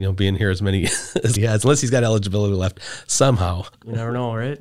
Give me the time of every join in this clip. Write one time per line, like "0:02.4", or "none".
0:01.4